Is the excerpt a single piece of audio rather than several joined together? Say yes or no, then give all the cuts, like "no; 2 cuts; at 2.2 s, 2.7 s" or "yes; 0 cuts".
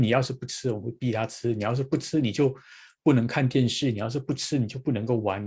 yes; 0 cuts